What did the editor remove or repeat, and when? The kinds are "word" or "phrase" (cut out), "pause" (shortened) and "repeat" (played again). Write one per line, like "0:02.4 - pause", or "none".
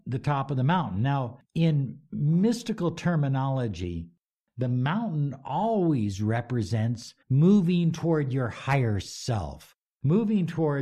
0:01.4 - pause
0:07.2 - pause